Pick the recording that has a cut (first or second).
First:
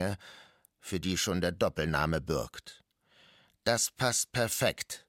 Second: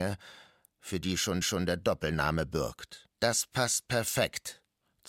second